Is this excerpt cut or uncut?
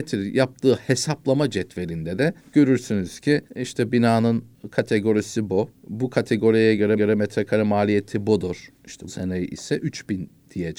cut